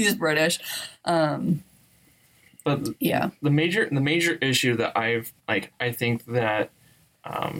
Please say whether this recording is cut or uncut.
cut